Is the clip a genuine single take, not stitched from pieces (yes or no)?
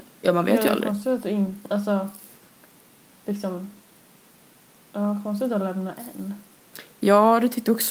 yes